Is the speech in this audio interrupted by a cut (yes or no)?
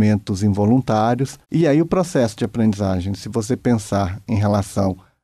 yes